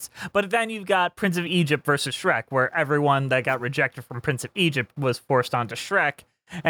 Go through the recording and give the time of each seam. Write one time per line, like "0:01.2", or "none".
none